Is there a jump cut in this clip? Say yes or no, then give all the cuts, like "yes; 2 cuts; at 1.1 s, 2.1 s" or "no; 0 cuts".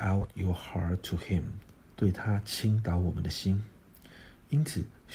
yes; 1 cut; at 1.8 s